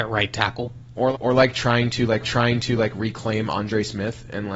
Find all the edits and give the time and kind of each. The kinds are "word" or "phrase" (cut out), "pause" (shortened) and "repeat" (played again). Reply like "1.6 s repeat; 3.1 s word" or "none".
1.1 s word; 2.2 s repeat